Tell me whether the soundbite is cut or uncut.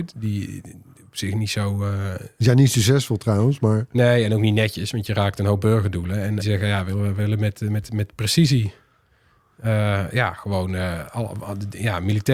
cut